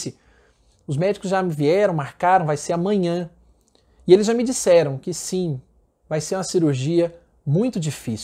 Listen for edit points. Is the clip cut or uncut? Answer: uncut